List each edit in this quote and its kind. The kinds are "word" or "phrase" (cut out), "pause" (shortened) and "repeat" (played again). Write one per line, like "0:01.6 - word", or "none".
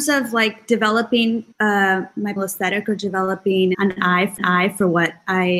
0:01.5 - pause
0:02.4 - word
0:03.7 - word
0:04.4 - repeat